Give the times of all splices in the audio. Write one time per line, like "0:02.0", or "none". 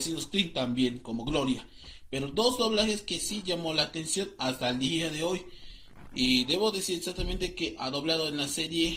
none